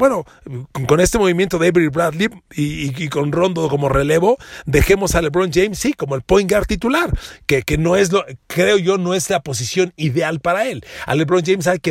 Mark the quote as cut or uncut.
uncut